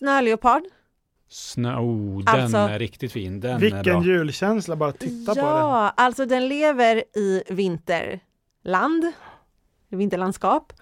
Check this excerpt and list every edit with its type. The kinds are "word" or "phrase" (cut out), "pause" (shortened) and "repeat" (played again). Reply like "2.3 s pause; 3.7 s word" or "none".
none